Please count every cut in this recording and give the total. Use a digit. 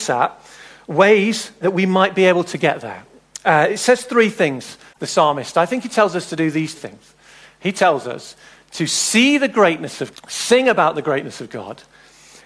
3